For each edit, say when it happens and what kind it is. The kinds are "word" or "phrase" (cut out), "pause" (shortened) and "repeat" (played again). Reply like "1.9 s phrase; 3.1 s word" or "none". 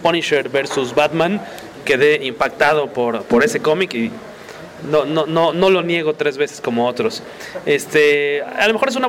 none